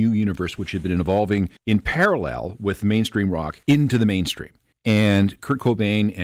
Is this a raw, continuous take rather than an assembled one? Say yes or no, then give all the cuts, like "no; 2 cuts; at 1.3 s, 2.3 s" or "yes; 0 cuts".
no; 3 cuts; at 1.6 s, 3.6 s, 4.7 s